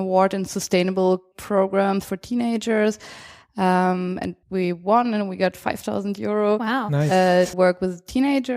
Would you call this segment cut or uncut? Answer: cut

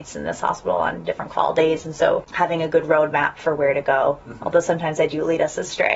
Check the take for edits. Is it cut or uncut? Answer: uncut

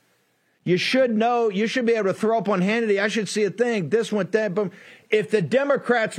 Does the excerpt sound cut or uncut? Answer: uncut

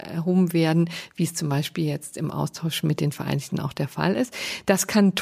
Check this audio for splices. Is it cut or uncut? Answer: cut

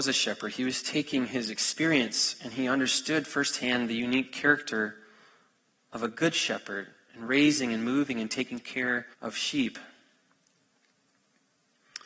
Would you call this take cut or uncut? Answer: cut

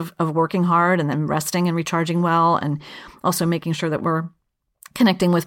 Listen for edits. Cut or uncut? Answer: uncut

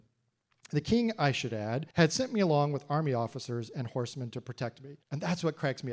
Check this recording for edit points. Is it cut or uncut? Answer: cut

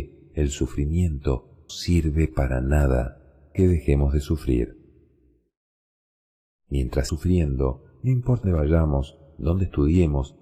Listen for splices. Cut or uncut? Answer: cut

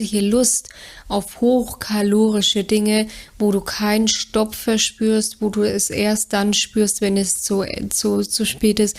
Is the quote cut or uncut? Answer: uncut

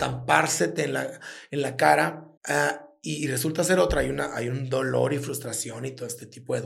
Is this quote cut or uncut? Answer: cut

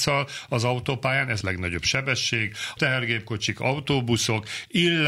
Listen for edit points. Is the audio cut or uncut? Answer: cut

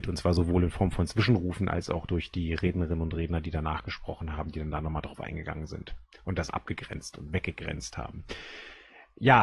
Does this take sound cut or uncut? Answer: uncut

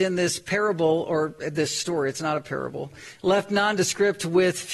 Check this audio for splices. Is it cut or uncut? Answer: uncut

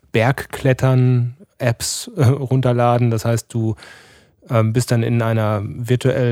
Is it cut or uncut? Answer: uncut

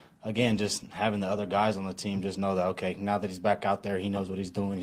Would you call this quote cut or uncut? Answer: uncut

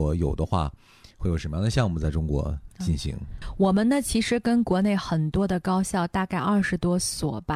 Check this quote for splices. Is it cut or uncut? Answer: uncut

